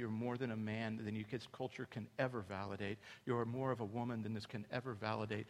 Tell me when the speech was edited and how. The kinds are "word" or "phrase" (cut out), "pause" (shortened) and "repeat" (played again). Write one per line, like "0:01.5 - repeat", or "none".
0:04.5 - word